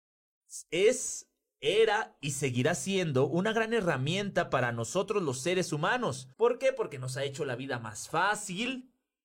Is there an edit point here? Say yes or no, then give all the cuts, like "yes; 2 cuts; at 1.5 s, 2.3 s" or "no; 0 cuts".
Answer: yes; 1 cut; at 6.3 s